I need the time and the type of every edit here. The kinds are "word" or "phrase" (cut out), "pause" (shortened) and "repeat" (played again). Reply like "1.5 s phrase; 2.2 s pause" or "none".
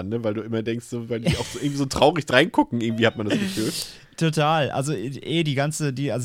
none